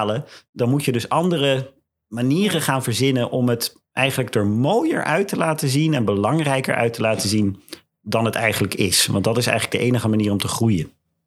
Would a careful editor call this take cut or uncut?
uncut